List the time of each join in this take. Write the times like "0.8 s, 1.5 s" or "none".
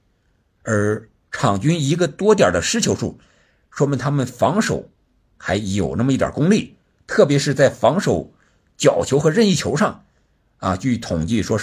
none